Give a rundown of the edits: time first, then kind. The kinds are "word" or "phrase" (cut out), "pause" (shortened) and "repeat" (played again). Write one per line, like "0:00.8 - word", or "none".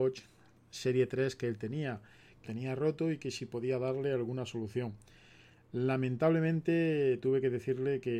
0:02.5 - word

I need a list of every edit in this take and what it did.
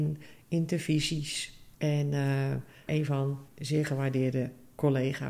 0:01.7 - pause
0:02.9 - word
0:03.5 - word

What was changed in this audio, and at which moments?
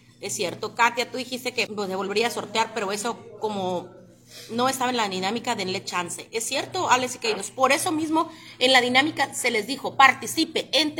0:01.7 - word

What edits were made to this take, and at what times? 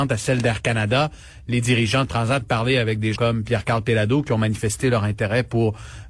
0:02.4 - phrase
0:03.2 - word

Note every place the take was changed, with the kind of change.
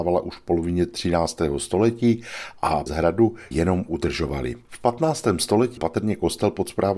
0:02.9 - word
0:03.5 - word
0:05.8 - word

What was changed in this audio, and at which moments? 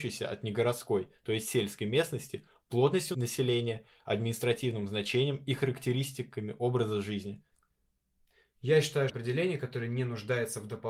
0:09.1 - phrase

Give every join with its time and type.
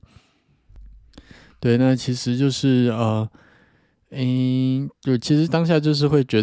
none

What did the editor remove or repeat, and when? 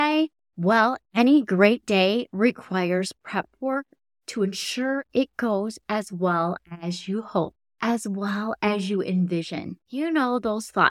none

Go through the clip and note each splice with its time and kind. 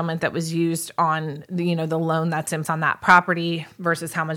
0:02.6 - word

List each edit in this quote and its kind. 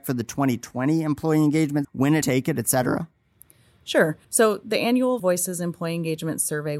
0:01.8 - word
0:02.2 - phrase
0:04.2 - pause
0:05.2 - word

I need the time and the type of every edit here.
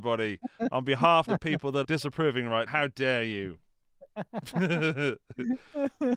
0:01.3 - word
0:01.8 - word
0:02.7 - word

